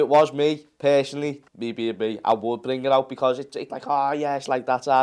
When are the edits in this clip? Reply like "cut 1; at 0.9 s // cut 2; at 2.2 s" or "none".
cut 1; at 1.5 s // cut 2; at 3.7 s